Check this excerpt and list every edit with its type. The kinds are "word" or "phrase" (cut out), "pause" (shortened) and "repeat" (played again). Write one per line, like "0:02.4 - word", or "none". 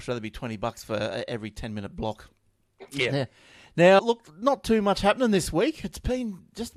0:04.0 - word